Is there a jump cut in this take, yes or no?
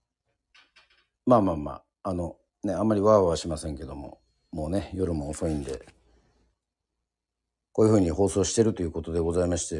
no